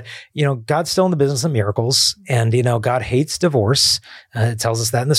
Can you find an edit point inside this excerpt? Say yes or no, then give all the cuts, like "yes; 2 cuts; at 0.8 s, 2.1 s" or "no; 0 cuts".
no; 0 cuts